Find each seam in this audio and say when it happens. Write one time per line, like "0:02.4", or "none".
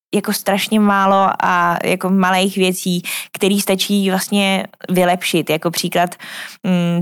none